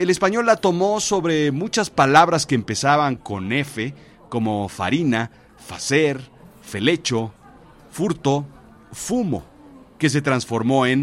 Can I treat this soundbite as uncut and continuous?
yes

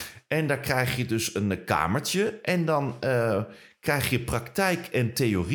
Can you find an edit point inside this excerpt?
no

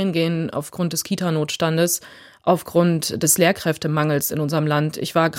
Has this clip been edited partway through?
no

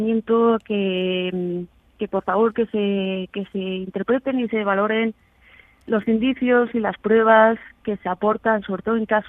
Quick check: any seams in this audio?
no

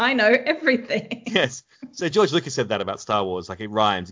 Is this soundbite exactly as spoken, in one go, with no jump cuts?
yes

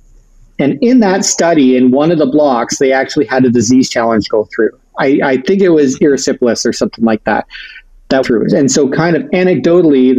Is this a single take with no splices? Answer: no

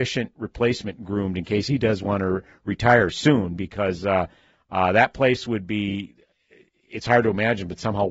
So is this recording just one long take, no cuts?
yes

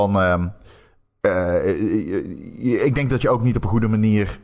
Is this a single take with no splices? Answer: yes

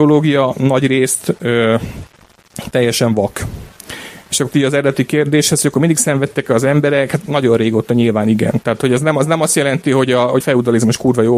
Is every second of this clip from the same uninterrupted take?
no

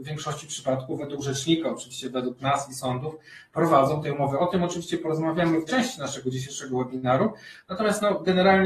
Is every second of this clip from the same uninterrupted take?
no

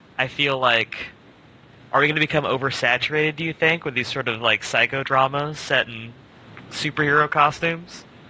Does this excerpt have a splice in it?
no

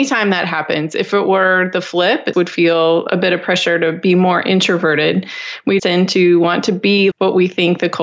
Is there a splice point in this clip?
yes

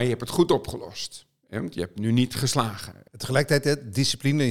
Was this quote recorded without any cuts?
yes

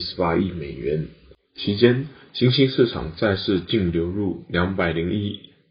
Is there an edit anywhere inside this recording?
no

